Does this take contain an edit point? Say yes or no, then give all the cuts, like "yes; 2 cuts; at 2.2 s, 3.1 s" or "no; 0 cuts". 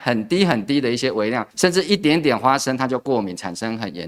yes; 1 cut; at 1.5 s